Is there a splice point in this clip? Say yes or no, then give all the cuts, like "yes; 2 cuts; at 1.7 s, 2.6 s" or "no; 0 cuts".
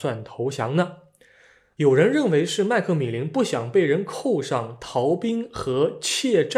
no; 0 cuts